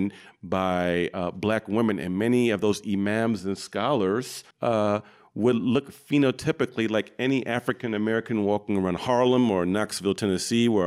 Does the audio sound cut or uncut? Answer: cut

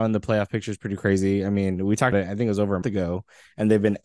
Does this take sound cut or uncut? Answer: cut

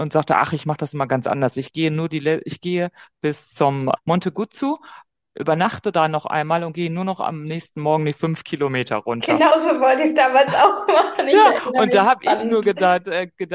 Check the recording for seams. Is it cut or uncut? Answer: cut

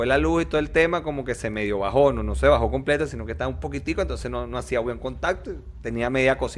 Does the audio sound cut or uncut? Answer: uncut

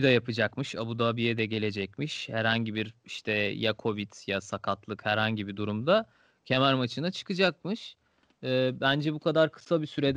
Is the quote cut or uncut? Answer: uncut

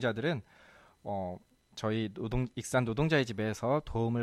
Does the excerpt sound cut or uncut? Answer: uncut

